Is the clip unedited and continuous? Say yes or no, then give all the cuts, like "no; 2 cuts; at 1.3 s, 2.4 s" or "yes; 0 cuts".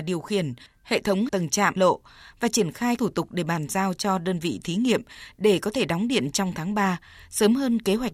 no; 3 cuts; at 1.3 s, 1.8 s, 3.0 s